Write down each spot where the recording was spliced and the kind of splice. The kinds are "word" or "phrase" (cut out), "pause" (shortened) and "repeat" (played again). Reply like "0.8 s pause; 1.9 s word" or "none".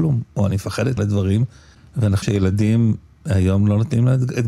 1.0 s phrase; 2.2 s word